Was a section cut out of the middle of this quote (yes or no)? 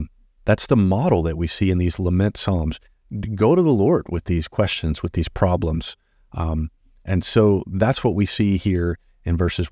no